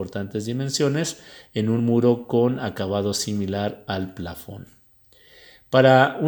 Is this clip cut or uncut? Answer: uncut